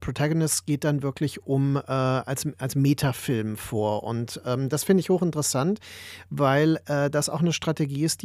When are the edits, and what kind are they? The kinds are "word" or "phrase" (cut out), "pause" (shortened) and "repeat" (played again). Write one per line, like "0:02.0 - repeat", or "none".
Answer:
none